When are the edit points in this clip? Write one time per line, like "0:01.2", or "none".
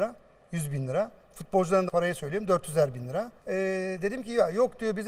0:01.9
0:03.4